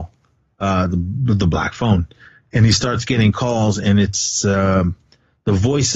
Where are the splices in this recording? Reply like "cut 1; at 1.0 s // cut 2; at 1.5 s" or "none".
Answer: none